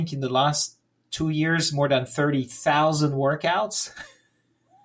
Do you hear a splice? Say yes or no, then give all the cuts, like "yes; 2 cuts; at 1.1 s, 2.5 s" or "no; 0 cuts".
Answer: no; 0 cuts